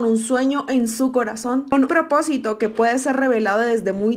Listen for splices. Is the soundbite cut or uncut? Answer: cut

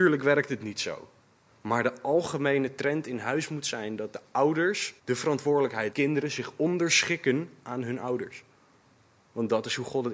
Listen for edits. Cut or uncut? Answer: cut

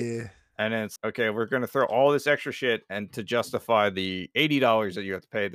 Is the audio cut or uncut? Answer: cut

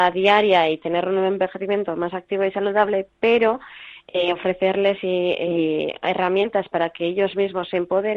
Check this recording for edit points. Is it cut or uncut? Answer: uncut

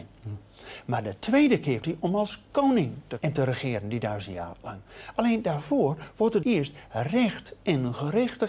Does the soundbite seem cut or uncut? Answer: cut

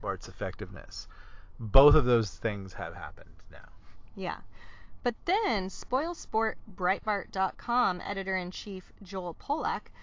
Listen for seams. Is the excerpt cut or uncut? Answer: uncut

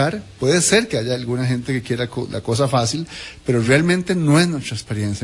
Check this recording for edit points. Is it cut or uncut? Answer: uncut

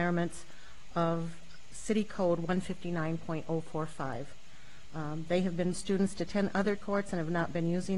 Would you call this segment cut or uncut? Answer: cut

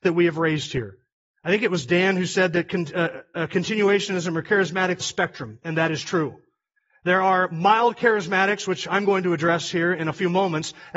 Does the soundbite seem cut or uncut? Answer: cut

